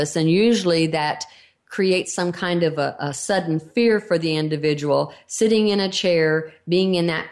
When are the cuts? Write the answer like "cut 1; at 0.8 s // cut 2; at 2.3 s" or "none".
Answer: none